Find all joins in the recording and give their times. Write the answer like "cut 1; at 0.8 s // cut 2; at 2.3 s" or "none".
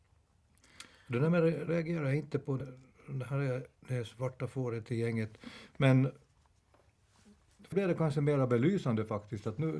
cut 1; at 1.7 s // cut 2; at 2.6 s // cut 3; at 3.8 s // cut 4; at 7.7 s